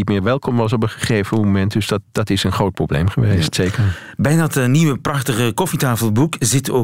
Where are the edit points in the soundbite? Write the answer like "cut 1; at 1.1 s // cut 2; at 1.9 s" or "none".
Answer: none